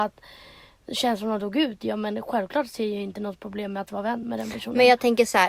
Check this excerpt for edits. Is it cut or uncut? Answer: uncut